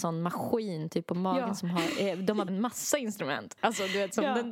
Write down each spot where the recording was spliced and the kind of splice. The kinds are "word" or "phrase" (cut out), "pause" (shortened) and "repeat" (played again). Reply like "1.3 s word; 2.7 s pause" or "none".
2.5 s phrase